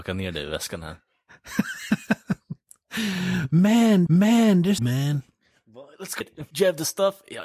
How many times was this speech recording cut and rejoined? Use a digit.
4